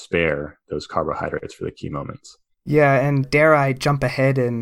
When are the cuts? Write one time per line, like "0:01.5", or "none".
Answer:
0:02.5
0:03.2